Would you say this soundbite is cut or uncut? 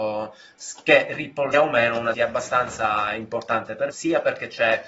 cut